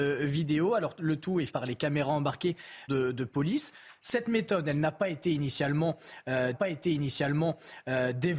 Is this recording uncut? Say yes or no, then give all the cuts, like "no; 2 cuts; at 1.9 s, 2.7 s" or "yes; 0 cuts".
no; 3 cuts; at 1.5 s, 2.9 s, 6.5 s